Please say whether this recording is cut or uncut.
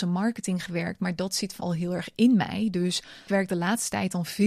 cut